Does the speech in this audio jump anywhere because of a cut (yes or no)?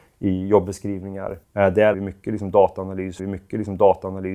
yes